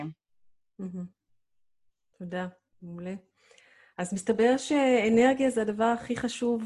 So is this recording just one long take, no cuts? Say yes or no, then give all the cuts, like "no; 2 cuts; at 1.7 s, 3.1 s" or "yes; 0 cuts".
yes; 0 cuts